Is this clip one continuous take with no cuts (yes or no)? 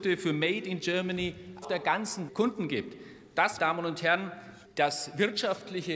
no